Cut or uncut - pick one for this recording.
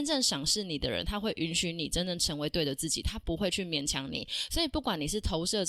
uncut